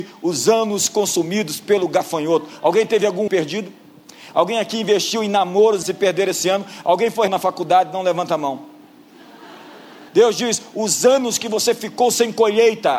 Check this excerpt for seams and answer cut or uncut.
cut